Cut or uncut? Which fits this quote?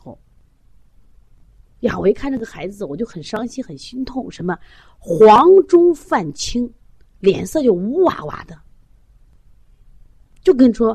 uncut